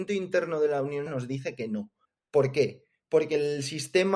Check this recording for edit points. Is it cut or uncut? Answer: cut